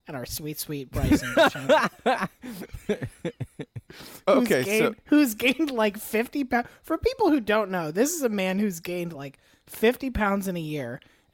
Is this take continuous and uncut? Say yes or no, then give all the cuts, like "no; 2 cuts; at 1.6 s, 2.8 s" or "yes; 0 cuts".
yes; 0 cuts